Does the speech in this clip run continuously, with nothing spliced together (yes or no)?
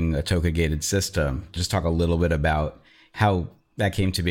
no